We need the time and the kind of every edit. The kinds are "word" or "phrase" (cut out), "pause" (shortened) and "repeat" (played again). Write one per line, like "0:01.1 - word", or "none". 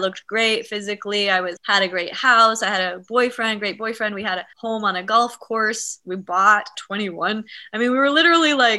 0:01.6 - word
0:04.5 - pause
0:06.7 - word

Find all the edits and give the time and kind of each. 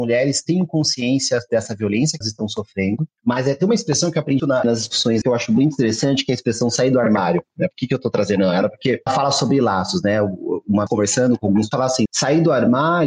0:02.2 - word
0:04.4 - word
0:05.2 - word
0:09.1 - word
0:10.9 - word
0:11.7 - word
0:12.1 - word

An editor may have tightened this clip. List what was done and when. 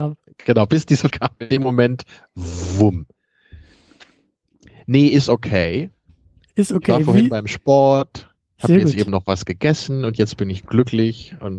0:01.1 - word

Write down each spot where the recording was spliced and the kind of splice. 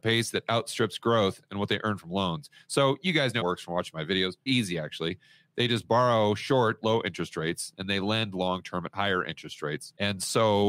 0:03.4 - phrase
0:04.5 - word
0:06.8 - word

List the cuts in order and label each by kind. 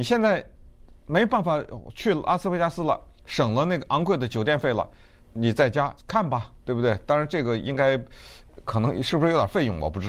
0:05.2 - pause
0:06.0 - pause
0:06.6 - pause

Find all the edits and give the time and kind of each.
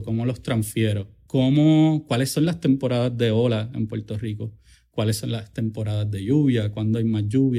none

